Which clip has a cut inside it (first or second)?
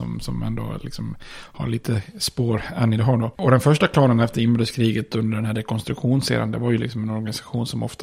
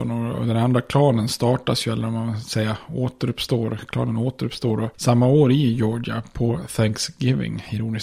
second